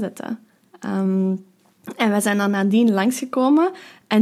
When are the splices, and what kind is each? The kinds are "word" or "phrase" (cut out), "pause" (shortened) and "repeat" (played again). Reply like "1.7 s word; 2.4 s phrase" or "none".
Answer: none